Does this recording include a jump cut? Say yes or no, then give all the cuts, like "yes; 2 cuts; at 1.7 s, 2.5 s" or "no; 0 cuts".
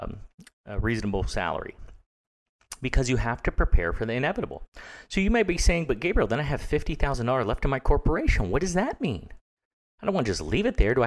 no; 0 cuts